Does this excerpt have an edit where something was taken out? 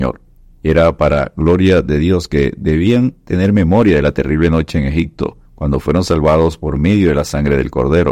yes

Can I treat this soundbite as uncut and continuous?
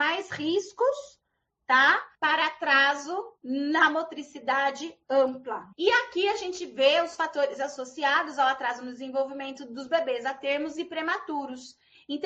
no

